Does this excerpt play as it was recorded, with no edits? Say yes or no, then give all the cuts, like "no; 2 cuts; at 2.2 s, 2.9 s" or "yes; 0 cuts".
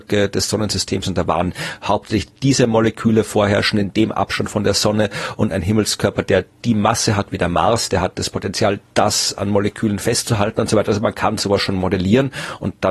yes; 0 cuts